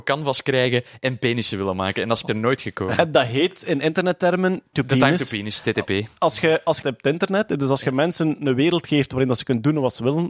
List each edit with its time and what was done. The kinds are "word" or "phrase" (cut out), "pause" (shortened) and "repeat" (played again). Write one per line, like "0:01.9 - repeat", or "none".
0:02.3 - word
0:04.7 - word
0:06.8 - phrase